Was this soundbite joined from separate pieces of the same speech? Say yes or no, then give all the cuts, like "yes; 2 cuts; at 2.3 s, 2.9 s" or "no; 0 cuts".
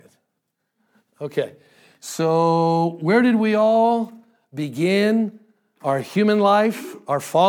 no; 0 cuts